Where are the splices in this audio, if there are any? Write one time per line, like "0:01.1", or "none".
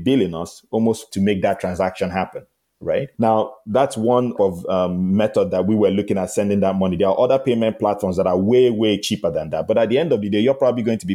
0:01.1
0:03.1
0:04.4